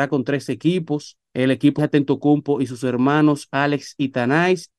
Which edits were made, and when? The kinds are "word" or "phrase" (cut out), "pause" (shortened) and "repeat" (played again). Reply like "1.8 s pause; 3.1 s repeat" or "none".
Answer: 1.3 s pause; 1.8 s word